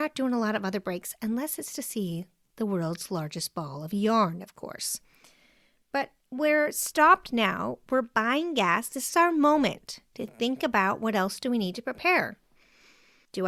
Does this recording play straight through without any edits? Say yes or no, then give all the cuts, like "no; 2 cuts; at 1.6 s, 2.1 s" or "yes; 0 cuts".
yes; 0 cuts